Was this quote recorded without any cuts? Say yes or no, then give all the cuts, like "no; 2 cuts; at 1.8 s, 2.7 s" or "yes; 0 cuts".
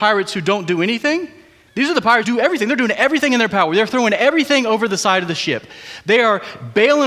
no; 1 cut; at 2.2 s